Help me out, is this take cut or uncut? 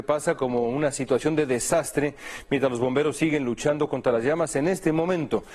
uncut